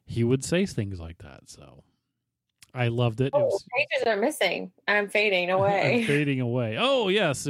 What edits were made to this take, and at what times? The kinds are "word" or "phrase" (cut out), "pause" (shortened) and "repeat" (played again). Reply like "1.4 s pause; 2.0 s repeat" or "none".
none